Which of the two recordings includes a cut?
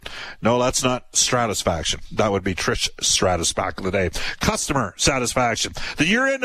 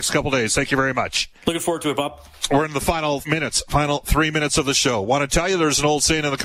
second; 2 cuts; at 1.4 s, 3.2 s

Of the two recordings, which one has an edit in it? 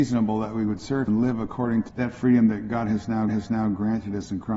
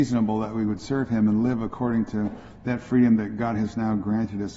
first; 3 cuts; at 1.1 s, 1.9 s, 3.3 s

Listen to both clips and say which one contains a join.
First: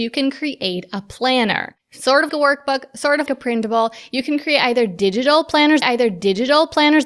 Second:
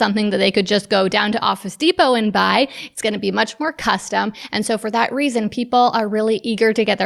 first; 3 cuts; at 2.3 s, 3.3 s, 5.8 s

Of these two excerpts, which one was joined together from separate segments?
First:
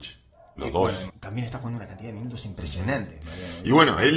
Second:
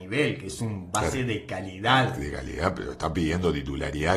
first; 1 cut; at 1.1 s

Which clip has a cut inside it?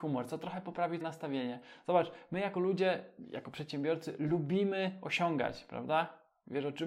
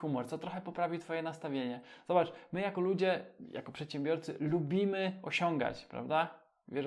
first; 1 cut; at 1.0 s

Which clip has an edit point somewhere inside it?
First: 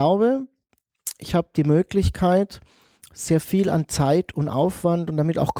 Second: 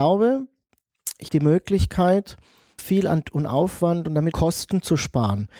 second; 4 cuts; at 1.3 s, 2.8 s, 3.2 s, 4.3 s

